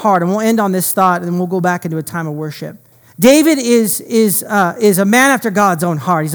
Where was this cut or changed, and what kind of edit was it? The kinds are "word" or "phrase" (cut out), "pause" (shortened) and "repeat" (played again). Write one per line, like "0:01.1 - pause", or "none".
0:02.9 - pause